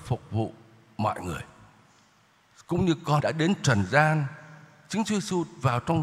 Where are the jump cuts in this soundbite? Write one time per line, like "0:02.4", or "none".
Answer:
0:03.2